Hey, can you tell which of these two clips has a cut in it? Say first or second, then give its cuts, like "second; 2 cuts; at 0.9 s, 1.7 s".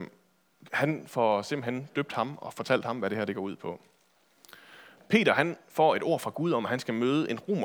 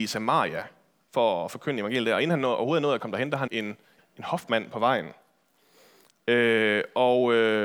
second; 2 cuts; at 3.5 s, 4.0 s